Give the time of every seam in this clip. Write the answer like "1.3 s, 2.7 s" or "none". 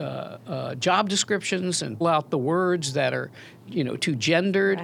2.0 s